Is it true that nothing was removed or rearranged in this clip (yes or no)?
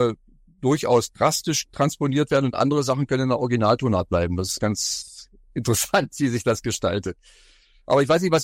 yes